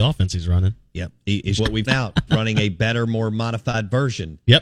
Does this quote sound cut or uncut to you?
cut